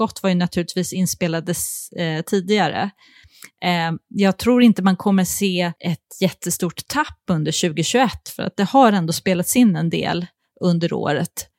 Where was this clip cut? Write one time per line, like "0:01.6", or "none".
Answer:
0:05.8